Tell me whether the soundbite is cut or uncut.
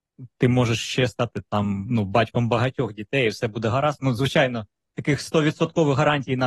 uncut